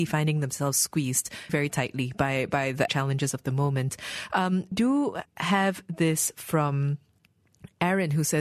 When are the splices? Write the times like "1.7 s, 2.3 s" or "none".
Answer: 1.5 s, 2.9 s, 4.7 s, 5.3 s